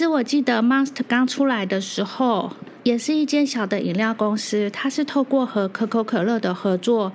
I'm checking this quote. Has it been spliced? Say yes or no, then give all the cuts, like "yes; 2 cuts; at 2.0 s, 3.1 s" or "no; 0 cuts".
yes; 2 cuts; at 1.1 s, 2.8 s